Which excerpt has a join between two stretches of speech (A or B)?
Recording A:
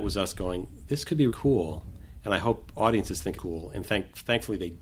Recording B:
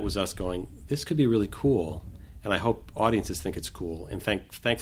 A